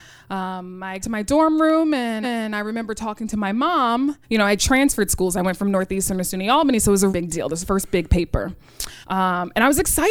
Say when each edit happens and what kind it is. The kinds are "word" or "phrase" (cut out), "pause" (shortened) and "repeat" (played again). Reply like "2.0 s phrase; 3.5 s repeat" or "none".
1.0 s phrase; 2.2 s repeat; 4.2 s pause; 4.6 s word; 7.1 s word; 7.6 s word; 9.0 s pause